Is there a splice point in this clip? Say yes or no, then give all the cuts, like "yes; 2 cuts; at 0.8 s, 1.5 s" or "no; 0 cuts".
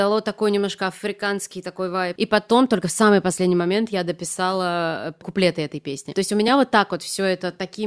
no; 0 cuts